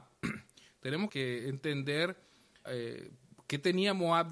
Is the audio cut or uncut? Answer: cut